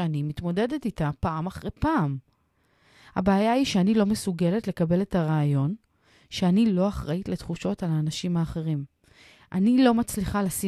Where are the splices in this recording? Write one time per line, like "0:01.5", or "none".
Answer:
0:01.8